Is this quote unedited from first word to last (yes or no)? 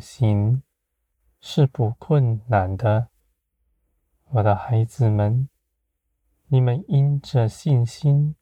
yes